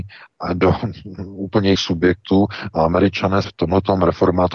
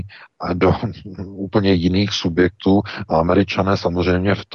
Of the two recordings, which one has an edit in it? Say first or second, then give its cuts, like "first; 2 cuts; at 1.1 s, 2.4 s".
first; 2 cuts; at 1.8 s, 3.4 s